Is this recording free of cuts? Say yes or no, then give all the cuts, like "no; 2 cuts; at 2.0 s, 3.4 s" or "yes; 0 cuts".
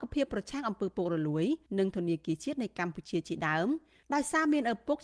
no; 1 cut; at 1.7 s